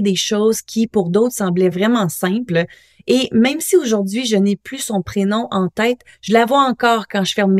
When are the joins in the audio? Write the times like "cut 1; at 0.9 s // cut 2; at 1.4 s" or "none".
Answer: none